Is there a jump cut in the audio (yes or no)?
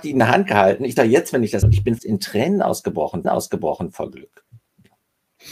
yes